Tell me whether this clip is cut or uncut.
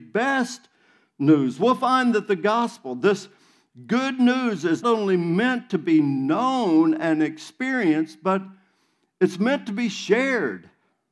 cut